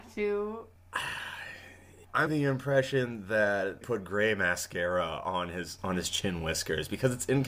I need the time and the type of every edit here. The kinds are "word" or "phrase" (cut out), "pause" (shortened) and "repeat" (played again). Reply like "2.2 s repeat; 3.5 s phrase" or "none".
2.3 s word; 3.8 s word